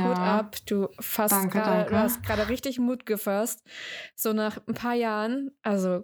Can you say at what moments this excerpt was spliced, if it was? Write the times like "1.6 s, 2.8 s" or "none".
none